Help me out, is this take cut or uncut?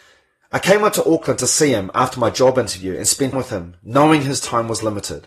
cut